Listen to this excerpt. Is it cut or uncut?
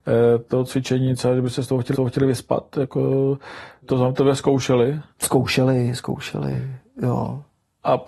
cut